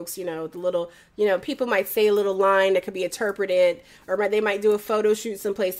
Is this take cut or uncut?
uncut